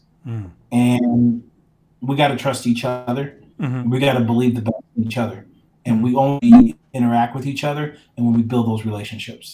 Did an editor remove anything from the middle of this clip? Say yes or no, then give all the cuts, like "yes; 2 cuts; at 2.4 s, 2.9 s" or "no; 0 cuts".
yes; 1 cut; at 6.4 s